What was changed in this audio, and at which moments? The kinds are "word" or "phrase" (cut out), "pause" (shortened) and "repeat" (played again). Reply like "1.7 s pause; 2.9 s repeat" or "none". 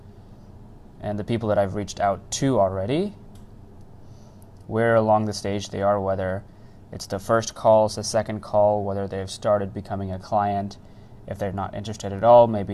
none